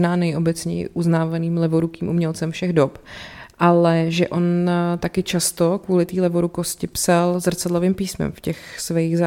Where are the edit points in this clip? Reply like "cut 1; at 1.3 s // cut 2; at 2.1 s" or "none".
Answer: none